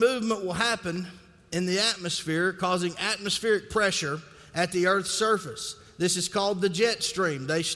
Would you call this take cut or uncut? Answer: uncut